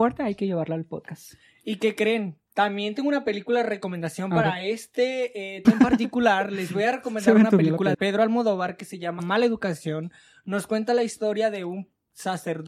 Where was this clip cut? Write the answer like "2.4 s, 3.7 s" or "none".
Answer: 5.6 s, 7.9 s, 9.2 s